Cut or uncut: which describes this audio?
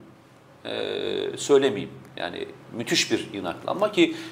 uncut